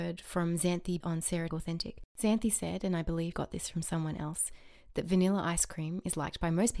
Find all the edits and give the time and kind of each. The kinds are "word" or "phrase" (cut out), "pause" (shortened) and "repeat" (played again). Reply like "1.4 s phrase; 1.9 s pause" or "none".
1.0 s word; 1.5 s phrase; 2.1 s pause; 3.3 s word